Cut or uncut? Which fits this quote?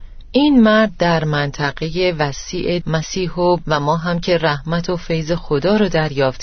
cut